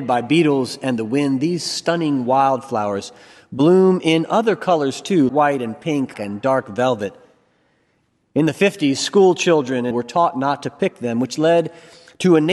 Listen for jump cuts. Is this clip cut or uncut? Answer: cut